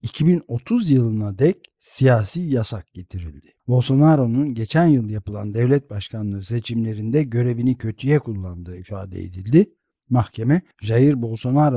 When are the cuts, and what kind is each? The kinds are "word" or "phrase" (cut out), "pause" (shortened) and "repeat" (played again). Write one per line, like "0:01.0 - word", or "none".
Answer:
0:03.6 - pause
0:10.7 - pause